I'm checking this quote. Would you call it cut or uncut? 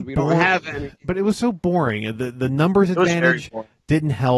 uncut